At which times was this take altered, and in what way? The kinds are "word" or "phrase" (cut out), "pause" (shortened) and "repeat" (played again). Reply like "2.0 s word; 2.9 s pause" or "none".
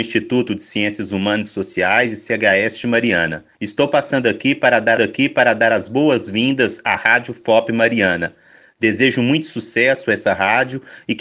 3.5 s pause; 5.0 s repeat